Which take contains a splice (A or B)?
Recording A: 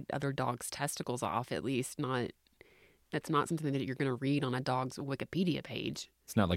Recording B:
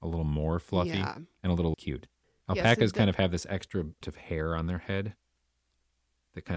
B